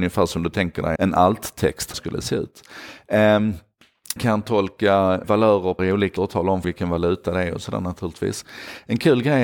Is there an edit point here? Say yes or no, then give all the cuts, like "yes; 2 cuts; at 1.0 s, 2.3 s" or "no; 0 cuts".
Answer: yes; 7 cuts; at 1.0 s, 1.9 s, 4.2 s, 5.2 s, 5.8 s, 6.2 s, 6.6 s